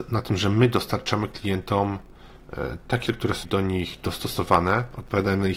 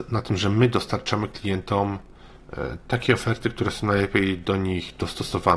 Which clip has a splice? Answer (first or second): first